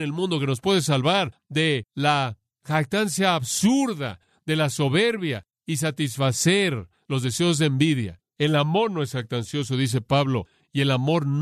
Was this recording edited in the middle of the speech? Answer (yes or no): no